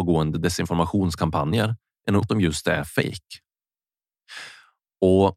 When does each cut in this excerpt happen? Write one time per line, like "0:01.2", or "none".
0:02.2